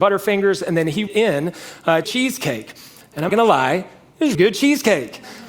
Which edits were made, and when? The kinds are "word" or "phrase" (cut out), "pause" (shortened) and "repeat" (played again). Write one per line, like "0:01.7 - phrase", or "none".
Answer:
0:01.1 - phrase
0:02.0 - phrase
0:03.3 - word
0:04.3 - word